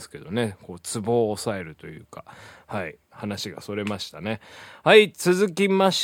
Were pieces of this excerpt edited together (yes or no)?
yes